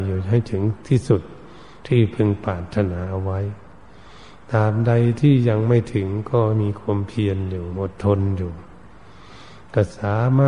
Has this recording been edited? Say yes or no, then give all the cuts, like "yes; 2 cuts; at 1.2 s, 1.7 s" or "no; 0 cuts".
no; 0 cuts